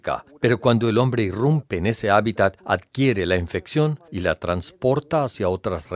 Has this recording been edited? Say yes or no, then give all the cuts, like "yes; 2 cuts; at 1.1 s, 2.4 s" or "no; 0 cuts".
yes; 1 cut; at 4.1 s